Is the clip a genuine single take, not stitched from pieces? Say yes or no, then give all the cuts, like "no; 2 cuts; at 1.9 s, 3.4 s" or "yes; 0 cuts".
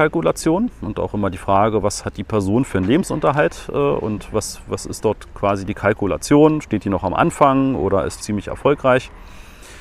no; 1 cut; at 8.2 s